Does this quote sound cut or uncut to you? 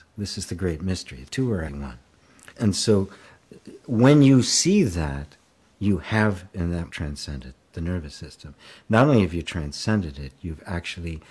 cut